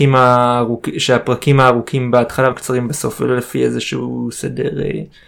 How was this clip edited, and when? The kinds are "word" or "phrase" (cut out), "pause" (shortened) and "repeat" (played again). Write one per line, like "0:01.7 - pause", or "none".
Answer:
0:02.5 - word